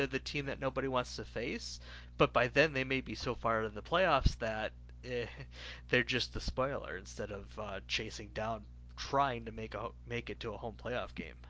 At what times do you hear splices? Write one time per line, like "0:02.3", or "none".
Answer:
none